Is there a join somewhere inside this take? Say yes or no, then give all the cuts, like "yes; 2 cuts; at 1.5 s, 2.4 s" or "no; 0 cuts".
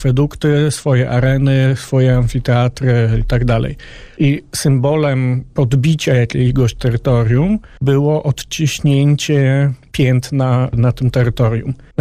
no; 0 cuts